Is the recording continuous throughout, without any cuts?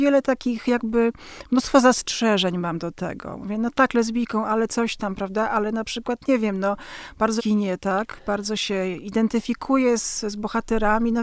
no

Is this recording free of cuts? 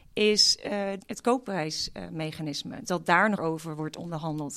no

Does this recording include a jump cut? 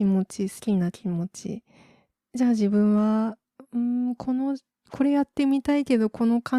no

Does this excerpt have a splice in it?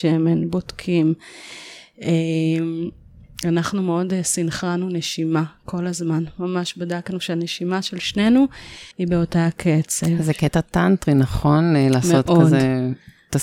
yes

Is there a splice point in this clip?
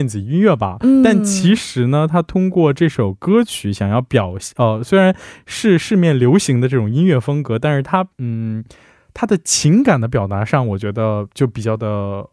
yes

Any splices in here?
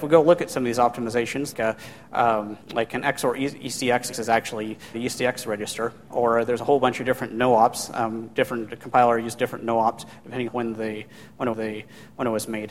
yes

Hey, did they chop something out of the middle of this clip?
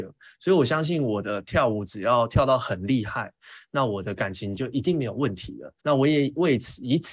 yes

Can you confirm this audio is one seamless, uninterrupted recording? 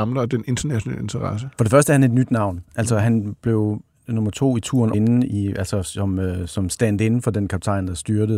no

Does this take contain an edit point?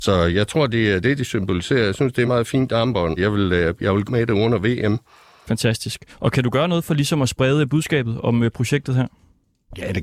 yes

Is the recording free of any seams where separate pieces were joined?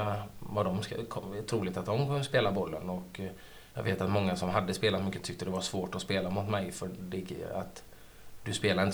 no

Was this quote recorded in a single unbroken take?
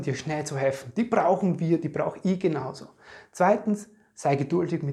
yes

